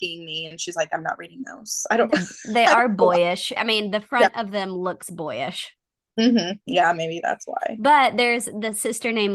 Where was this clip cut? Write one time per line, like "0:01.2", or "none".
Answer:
0:03.6

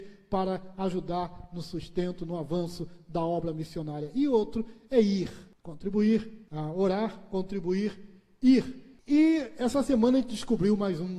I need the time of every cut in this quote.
none

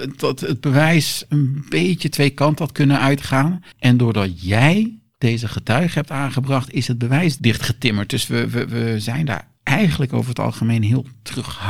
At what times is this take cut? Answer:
0:03.7

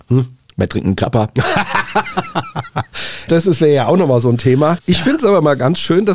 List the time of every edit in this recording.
0:03.3

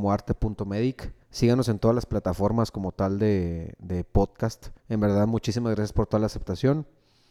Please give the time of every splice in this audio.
0:01.2
0:04.8

